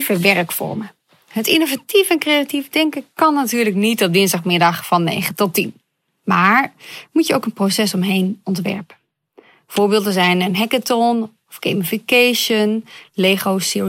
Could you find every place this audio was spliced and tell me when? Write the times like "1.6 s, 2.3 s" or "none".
none